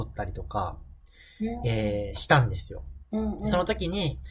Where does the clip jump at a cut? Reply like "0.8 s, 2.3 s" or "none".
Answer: 3.0 s